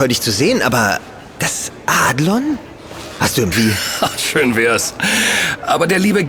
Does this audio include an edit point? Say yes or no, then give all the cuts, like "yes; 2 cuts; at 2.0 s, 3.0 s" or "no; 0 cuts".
yes; 1 cut; at 3.5 s